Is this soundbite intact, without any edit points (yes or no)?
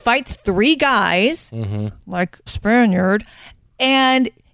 no